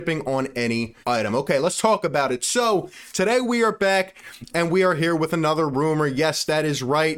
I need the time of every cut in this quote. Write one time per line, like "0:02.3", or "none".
0:01.0